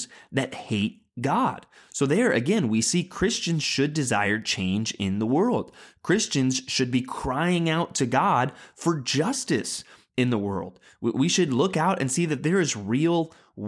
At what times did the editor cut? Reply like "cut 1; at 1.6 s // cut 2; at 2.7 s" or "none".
none